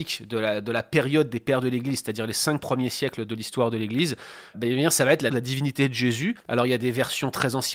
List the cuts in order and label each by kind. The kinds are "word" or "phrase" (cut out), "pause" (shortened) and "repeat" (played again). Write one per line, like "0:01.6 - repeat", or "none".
0:04.5 - word
0:05.3 - word
0:06.4 - pause